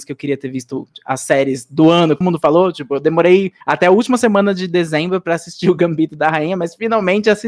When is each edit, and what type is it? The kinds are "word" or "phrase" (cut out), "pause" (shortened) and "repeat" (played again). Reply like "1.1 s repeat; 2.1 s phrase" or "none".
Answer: 2.2 s word; 3.6 s pause